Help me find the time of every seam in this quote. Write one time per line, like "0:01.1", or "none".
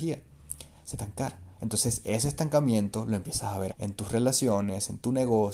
0:00.9
0:01.5
0:03.7